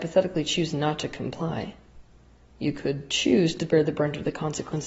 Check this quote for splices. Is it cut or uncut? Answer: uncut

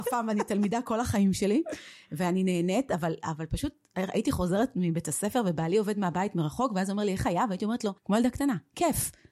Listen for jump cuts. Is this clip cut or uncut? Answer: cut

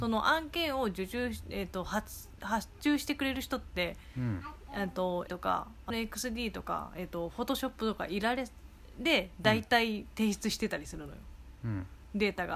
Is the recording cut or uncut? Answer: cut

